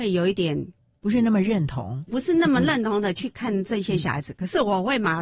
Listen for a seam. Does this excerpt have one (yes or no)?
yes